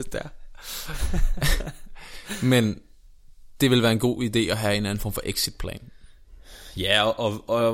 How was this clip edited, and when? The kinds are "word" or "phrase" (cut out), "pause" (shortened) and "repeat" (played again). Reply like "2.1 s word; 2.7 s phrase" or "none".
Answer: none